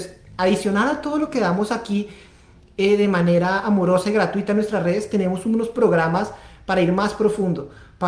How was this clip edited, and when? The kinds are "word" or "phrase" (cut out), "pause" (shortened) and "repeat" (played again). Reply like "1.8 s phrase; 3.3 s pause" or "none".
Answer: none